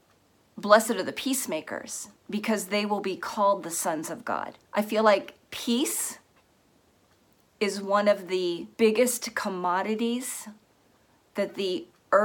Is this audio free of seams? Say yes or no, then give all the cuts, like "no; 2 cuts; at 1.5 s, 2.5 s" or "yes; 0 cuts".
no; 4 cuts; at 2.2 s, 4.6 s, 5.4 s, 8.7 s